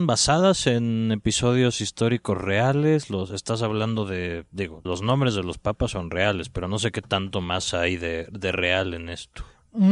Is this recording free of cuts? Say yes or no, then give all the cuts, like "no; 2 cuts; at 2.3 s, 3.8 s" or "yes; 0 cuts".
no; 1 cut; at 4.9 s